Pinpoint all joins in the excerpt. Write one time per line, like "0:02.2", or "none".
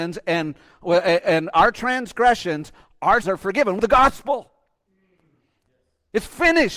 0:03.2
0:03.8